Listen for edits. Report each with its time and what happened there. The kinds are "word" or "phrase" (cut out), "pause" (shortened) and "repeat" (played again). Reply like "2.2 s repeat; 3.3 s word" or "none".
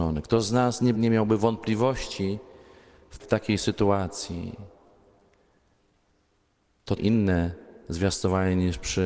0.9 s word; 3.2 s word; 7.0 s word